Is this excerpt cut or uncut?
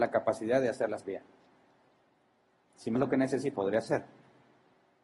cut